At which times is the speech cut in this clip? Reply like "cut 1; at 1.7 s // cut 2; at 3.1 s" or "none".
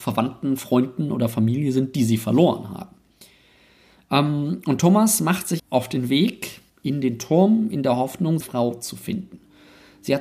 cut 1; at 5.6 s // cut 2; at 6.7 s // cut 3; at 8.4 s